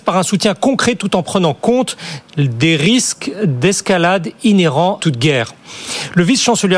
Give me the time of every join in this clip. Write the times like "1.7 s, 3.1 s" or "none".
5.0 s